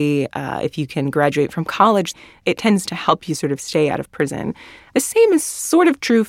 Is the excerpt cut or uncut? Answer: uncut